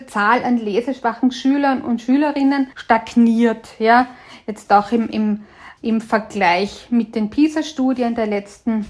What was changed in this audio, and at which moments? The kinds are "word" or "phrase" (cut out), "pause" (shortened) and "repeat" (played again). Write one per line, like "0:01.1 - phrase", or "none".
0:02.7 - pause